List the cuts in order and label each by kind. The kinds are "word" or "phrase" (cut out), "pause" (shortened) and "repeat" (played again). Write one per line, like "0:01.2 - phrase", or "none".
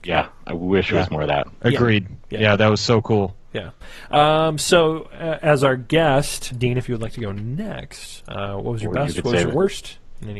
0:06.5 - word